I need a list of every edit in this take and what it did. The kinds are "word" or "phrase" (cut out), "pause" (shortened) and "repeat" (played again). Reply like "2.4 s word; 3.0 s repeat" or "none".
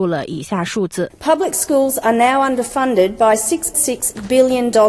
3.7 s word